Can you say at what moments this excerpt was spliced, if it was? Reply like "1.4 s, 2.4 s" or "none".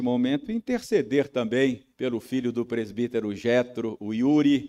1.9 s

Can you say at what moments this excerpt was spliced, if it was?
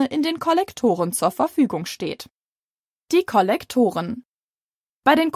none

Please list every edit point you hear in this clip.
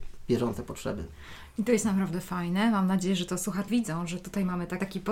3.7 s

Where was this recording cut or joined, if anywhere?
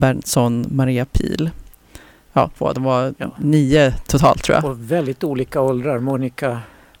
2.6 s

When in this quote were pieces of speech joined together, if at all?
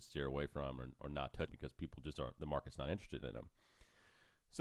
1.5 s

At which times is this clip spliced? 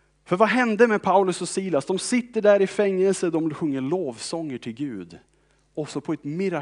none

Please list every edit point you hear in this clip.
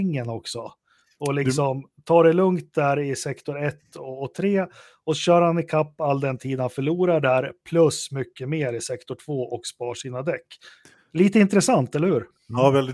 none

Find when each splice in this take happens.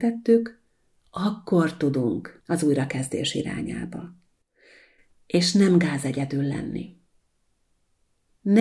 2.4 s

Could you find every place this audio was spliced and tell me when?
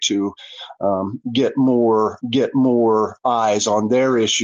2.2 s

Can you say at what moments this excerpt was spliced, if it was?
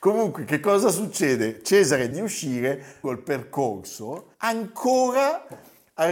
2.1 s, 3.0 s, 4.3 s

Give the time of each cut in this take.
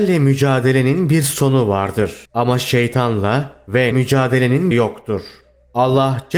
2.2 s, 3.9 s, 4.7 s

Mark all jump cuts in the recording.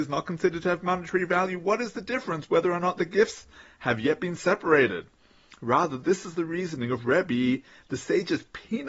none

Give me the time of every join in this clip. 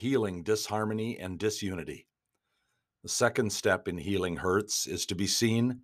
none

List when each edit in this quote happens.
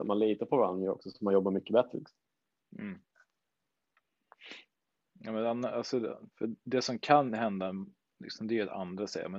4.9 s, 6.3 s

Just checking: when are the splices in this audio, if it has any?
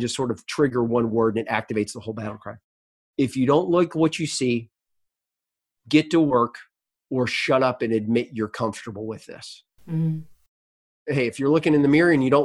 none

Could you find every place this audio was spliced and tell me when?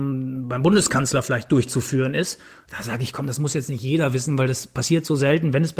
none

